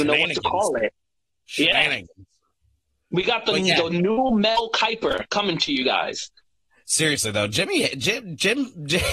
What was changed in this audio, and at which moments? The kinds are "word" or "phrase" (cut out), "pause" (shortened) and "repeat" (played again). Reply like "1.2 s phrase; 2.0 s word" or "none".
5.3 s word